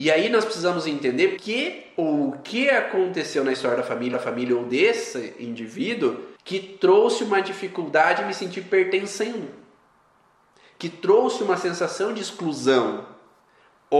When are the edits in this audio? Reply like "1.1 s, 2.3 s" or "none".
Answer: 1.4 s, 4.1 s, 6.3 s